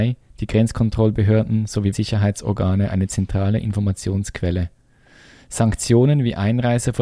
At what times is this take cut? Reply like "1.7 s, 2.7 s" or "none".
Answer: 1.9 s